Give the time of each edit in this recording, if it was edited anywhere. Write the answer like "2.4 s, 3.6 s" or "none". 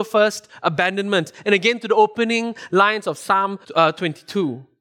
3.6 s